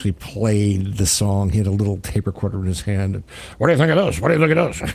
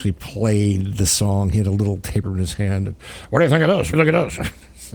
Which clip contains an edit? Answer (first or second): second